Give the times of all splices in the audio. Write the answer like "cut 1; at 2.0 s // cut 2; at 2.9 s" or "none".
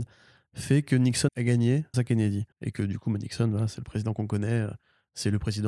cut 1; at 1.3 s // cut 2; at 1.9 s // cut 3; at 2.5 s